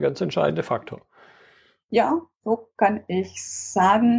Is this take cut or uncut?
uncut